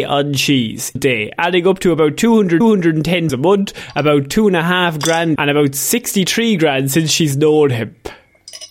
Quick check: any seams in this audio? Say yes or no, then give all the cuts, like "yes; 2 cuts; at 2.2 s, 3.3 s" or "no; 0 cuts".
yes; 4 cuts; at 1.0 s, 2.6 s, 3.3 s, 5.4 s